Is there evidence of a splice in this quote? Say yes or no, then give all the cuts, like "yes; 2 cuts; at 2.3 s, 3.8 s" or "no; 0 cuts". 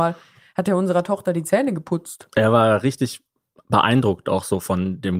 no; 0 cuts